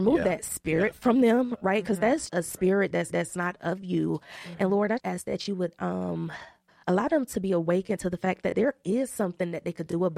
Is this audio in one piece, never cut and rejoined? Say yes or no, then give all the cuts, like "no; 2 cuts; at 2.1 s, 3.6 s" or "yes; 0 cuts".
no; 4 cuts; at 2.3 s, 3.1 s, 5.0 s, 6.7 s